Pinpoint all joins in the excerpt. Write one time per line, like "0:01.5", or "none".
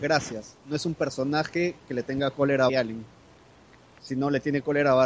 0:02.7